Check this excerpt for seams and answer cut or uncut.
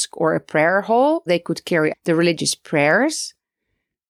cut